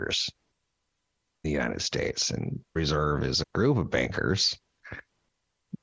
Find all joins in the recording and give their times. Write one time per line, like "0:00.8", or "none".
0:01.4
0:02.8
0:03.4